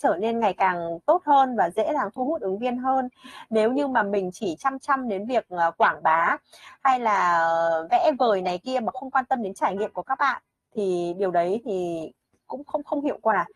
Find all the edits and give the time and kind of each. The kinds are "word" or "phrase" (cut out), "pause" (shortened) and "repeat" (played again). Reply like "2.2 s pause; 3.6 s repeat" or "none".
none

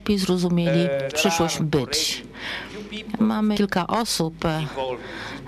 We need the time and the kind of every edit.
1.1 s word; 1.6 s word; 3.5 s word

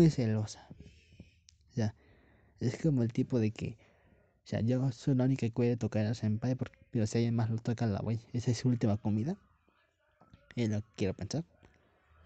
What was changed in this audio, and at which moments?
none

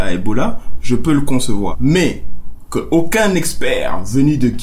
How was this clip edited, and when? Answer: none

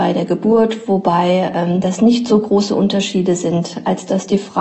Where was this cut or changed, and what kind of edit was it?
none

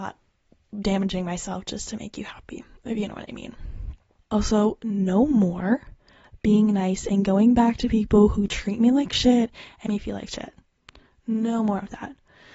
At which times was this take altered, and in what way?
9.9 s word

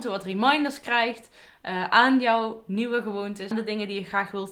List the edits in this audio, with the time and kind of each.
3.5 s word

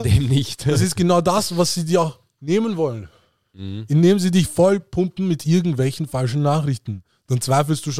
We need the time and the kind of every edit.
none

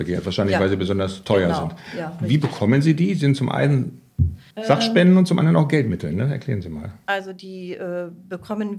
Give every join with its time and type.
4.5 s pause; 7.0 s pause

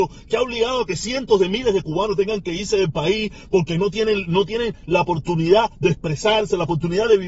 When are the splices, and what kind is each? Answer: none

